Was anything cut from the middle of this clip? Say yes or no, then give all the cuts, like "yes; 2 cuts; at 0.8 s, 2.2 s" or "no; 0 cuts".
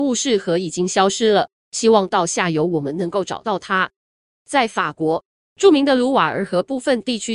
no; 0 cuts